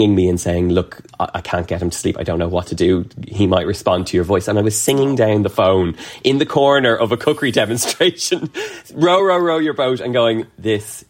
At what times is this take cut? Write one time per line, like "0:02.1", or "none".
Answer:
none